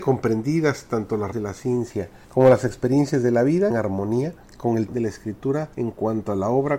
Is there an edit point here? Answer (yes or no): yes